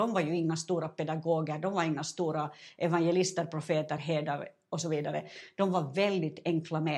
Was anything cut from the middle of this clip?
no; 0 cuts

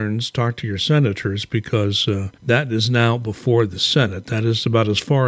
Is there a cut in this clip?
yes; 1 cut; at 2.3 s

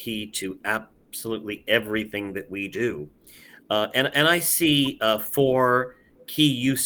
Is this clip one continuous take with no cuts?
yes; 0 cuts

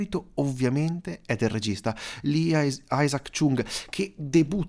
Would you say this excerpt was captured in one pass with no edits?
yes; 0 cuts

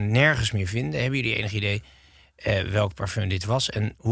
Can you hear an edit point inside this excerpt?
no; 0 cuts

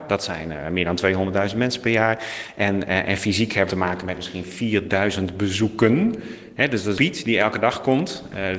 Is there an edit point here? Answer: yes; 2 cuts; at 3.7 s, 7.0 s

